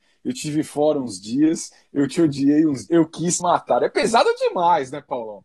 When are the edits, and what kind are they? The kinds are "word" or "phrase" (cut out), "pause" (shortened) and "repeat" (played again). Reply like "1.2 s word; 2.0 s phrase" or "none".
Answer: 2.9 s word; 3.4 s word